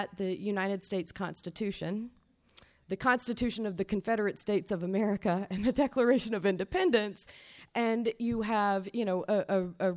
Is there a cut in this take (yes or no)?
no